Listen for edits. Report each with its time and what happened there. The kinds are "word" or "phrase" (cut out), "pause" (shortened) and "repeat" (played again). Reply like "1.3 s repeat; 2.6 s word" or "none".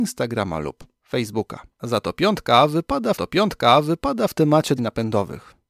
1.7 s pause; 3.1 s repeat; 4.8 s phrase